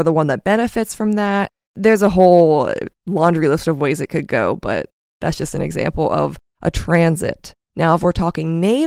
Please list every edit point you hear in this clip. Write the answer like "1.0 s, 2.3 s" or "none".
7.6 s